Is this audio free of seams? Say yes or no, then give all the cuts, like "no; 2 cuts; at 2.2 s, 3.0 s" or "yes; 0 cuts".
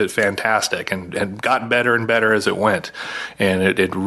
yes; 0 cuts